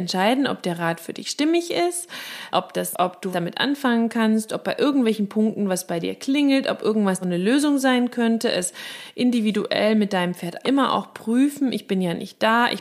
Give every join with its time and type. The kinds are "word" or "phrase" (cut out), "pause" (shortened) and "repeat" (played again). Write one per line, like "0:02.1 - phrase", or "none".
0:02.5 - word
0:02.9 - phrase
0:03.3 - word
0:07.2 - word
0:10.6 - word